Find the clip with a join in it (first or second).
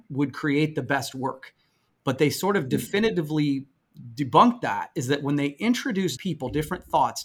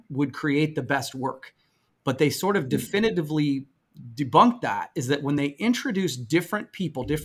first